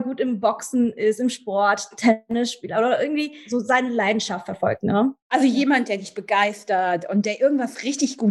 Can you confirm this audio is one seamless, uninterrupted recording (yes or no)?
yes